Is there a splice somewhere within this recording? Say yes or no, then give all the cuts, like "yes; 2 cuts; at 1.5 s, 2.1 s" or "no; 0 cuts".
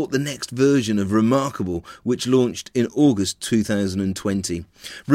no; 0 cuts